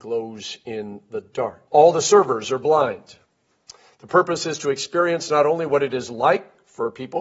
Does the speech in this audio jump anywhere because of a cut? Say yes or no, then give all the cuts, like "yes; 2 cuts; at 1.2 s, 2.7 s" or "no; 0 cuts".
yes; 1 cut; at 1.7 s